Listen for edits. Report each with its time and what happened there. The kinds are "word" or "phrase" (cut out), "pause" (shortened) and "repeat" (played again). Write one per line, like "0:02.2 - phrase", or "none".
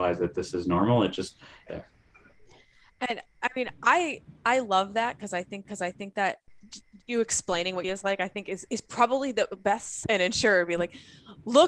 0:01.7 - phrase
0:03.7 - pause
0:05.6 - repeat
0:07.8 - phrase
0:08.7 - word
0:10.0 - phrase

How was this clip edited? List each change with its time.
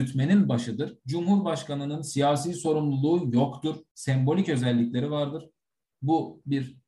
none

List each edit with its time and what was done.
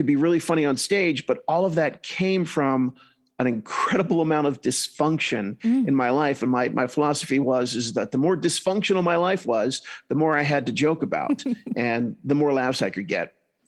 none

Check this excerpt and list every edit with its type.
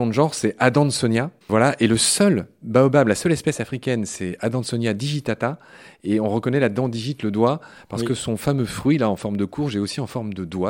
0:01.4 - pause

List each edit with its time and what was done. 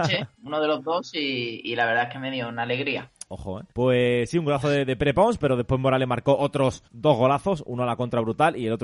0:03.3 - pause
0:03.7 - pause
0:06.9 - pause

